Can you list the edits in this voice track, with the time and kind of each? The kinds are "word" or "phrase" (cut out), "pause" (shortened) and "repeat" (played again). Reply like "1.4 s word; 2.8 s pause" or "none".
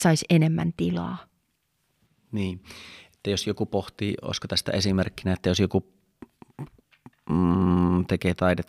none